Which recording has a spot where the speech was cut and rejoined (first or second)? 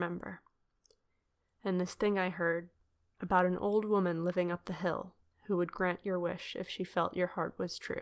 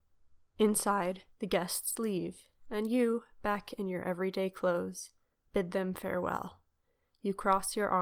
second